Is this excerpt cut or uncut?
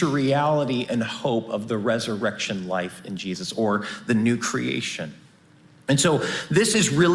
uncut